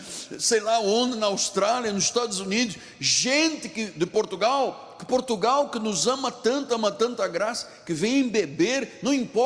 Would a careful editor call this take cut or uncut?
uncut